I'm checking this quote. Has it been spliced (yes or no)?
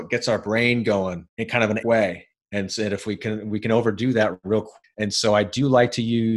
yes